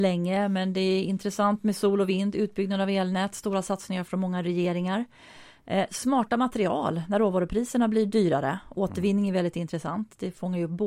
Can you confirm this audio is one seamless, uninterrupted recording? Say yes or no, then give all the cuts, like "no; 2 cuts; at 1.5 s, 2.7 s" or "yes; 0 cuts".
yes; 0 cuts